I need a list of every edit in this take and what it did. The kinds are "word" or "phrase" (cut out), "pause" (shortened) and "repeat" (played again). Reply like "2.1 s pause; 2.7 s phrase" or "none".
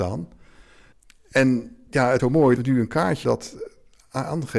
2.2 s word; 2.6 s word; 3.2 s word